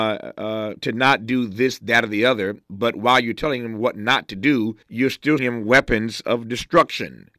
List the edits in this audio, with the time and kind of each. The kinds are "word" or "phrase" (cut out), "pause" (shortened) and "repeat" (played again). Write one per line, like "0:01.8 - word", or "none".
0:04.8 - pause
0:05.4 - word